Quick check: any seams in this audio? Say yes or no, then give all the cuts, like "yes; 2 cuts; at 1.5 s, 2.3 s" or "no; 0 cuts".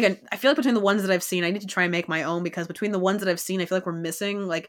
no; 0 cuts